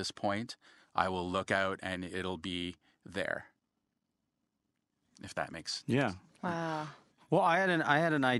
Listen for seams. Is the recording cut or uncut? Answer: uncut